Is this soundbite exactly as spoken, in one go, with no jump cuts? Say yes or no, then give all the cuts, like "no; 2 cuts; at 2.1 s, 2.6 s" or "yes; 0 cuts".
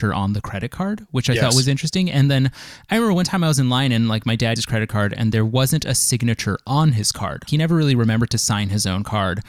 no; 2 cuts; at 4.6 s, 7.5 s